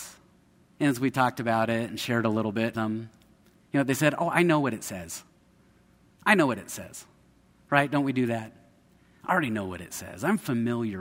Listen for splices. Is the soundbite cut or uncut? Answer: cut